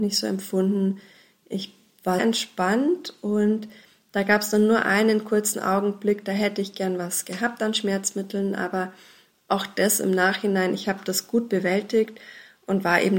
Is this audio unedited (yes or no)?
no